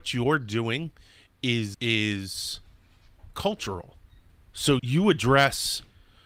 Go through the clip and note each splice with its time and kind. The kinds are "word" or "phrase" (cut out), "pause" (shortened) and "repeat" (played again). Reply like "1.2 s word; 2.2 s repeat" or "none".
1.7 s word; 4.8 s word